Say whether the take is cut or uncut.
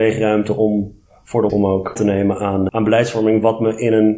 cut